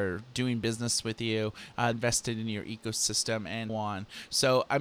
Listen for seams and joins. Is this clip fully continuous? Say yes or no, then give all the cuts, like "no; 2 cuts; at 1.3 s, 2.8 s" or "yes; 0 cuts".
no; 2 cuts; at 1.9 s, 3.7 s